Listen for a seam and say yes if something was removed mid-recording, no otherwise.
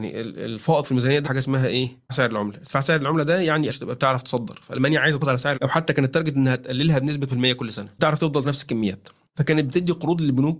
yes